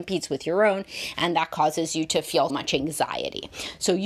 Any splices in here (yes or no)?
yes